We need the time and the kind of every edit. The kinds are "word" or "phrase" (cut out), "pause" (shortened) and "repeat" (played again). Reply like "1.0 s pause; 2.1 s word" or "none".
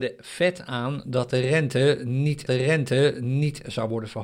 2.5 s repeat